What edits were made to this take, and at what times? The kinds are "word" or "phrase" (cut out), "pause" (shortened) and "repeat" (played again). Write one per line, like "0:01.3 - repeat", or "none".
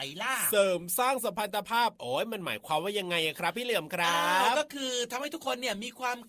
none